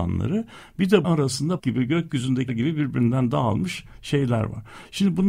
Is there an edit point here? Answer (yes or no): yes